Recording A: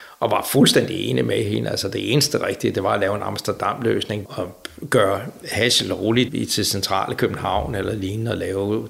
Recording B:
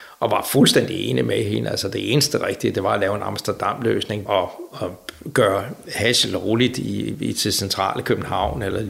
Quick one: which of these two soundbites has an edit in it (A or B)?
A